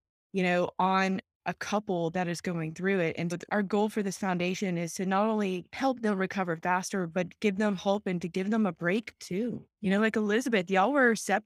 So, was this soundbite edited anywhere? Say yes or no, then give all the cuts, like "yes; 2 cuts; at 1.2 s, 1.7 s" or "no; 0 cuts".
yes; 1 cut; at 3.3 s